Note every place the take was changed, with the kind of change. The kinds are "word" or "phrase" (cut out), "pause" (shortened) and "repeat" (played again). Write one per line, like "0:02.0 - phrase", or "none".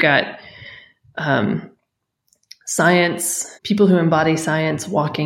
0:03.6 - pause